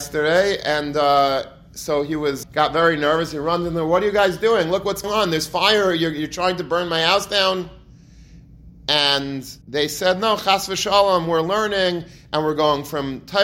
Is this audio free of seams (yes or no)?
no